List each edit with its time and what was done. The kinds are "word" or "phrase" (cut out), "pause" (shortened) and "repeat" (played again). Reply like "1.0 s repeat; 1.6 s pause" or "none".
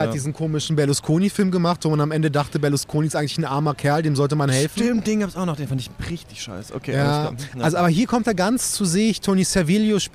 none